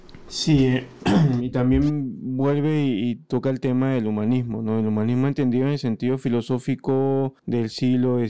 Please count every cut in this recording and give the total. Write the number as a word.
one